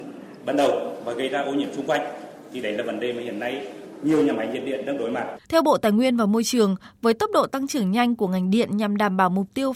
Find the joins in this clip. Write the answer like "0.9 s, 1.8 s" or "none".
5.4 s